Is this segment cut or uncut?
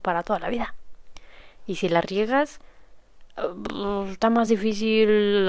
uncut